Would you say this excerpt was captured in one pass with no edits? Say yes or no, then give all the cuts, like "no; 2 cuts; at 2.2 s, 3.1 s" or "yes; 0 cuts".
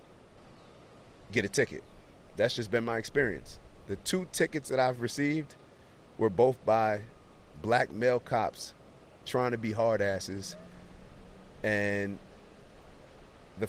yes; 0 cuts